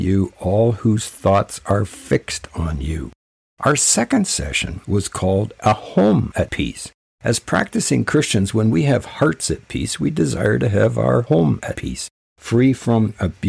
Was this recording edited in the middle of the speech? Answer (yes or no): no